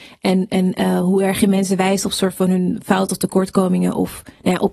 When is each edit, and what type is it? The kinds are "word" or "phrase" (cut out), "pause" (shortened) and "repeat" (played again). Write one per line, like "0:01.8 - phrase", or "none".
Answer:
none